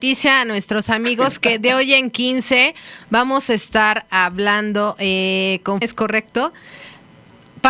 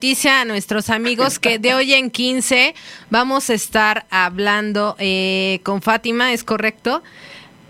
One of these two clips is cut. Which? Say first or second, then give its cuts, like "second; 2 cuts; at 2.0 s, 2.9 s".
first; 1 cut; at 5.8 s